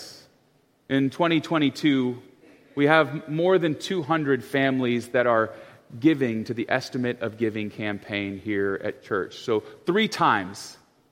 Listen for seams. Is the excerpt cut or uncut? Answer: uncut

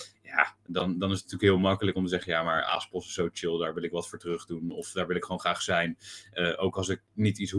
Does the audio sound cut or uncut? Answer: uncut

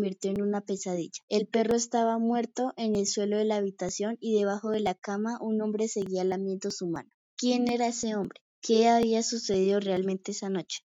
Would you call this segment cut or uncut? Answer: cut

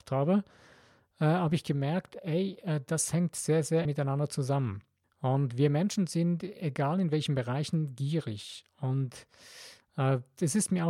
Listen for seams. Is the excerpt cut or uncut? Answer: cut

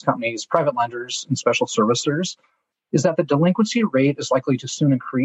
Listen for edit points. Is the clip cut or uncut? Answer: uncut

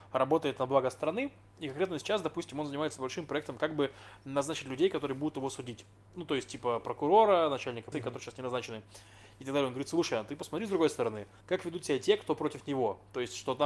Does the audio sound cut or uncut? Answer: cut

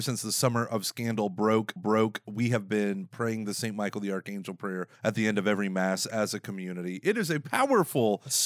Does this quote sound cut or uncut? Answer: cut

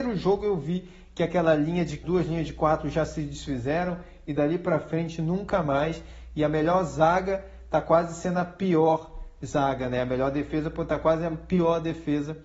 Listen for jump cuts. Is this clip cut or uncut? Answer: cut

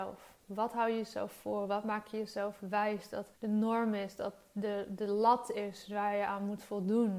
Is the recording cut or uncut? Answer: cut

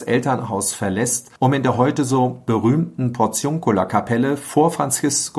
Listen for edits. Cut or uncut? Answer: cut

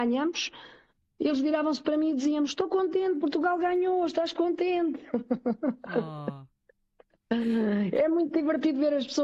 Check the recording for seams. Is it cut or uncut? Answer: uncut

